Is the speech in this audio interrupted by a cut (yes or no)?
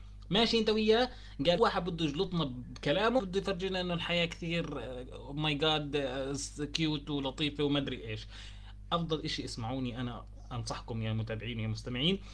yes